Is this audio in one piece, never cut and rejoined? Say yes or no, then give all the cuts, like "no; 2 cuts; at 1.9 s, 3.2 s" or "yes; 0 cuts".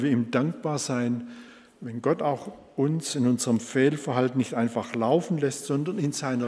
yes; 0 cuts